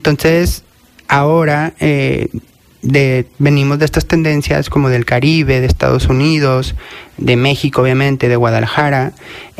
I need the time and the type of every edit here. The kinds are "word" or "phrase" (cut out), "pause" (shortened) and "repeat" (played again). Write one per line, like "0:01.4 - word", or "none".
none

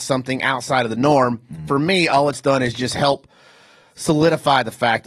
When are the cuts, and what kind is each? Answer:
none

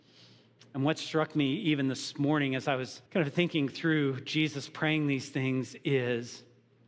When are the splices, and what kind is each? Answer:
0:03.1 - pause

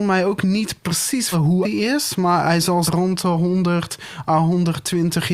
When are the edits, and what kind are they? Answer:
0:01.3 - word
0:01.6 - word
0:02.9 - word

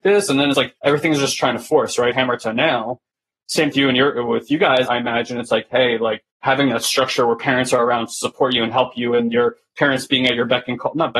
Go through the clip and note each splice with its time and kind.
0:03.7 - phrase
0:06.3 - pause

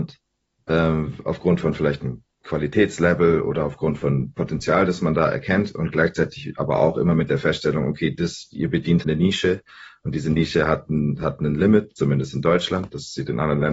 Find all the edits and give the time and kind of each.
0:09.0 - word

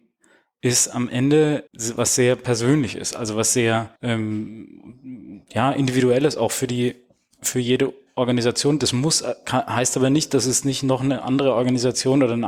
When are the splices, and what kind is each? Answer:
0:01.7 - pause
0:04.0 - pause

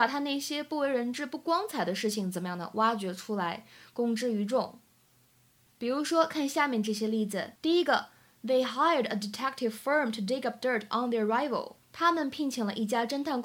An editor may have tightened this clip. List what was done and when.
0:07.6 - pause
0:11.8 - pause

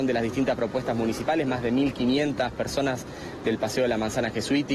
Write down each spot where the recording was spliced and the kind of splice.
none

